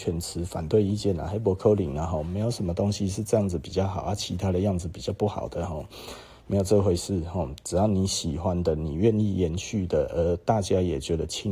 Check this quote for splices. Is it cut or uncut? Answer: uncut